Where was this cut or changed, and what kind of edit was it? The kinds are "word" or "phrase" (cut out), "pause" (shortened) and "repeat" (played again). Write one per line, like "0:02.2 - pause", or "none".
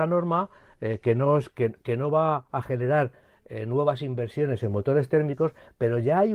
none